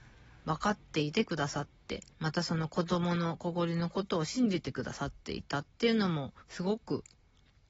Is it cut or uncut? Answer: cut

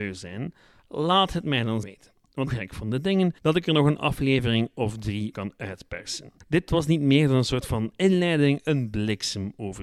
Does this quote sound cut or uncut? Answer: cut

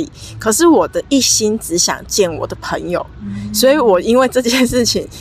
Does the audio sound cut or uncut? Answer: uncut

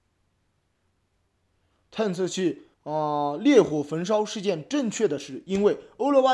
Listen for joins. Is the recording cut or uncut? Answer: cut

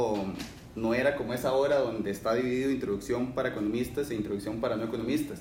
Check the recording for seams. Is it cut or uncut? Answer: uncut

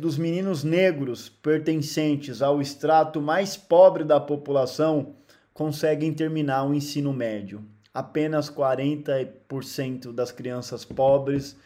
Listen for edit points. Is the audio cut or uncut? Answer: uncut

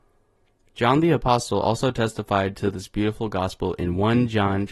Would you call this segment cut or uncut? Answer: uncut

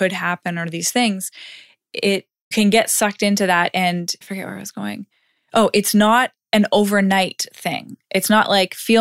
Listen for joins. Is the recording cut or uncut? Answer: cut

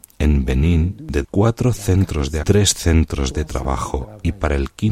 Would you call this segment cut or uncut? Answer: cut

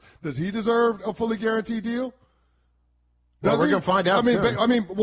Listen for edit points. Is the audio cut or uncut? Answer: uncut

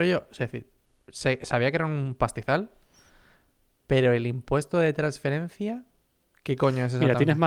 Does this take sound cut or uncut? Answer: uncut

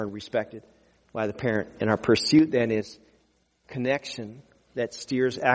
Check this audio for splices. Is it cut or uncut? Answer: uncut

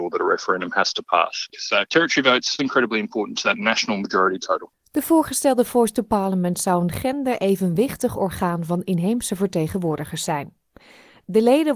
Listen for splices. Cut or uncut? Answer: cut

